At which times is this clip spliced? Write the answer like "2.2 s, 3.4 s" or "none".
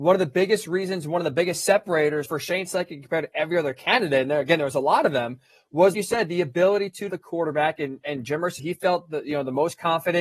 2.2 s, 5.9 s, 7.1 s, 8.6 s